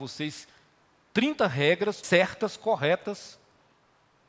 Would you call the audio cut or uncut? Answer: cut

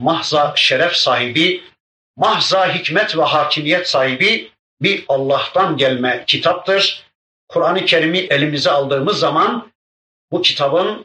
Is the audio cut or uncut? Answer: uncut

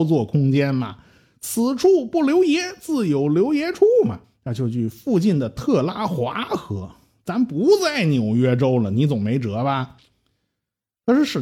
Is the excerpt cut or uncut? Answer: uncut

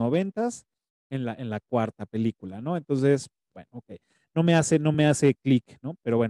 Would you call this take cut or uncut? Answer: uncut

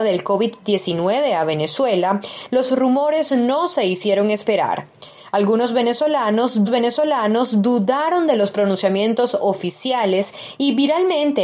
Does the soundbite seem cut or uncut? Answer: cut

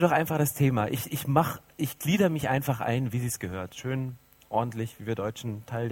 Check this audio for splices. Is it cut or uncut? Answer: uncut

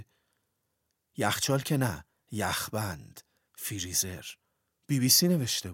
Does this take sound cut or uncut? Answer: uncut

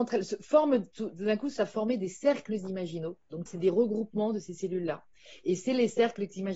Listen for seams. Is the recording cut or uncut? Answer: cut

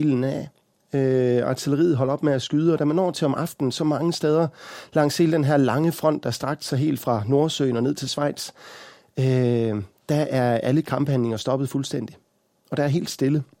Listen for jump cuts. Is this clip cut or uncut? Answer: uncut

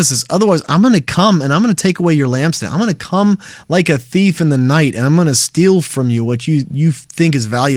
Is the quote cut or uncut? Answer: uncut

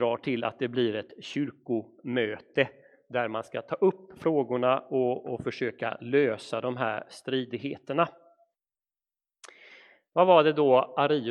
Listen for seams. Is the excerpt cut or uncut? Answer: uncut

